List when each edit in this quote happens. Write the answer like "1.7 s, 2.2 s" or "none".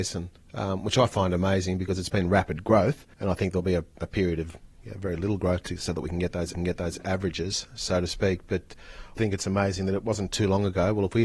3.1 s, 6.5 s, 9.2 s